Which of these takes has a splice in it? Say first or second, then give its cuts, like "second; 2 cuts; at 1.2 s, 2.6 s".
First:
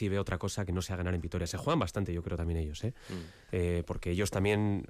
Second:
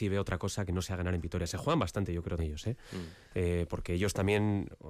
second; 1 cut; at 2.4 s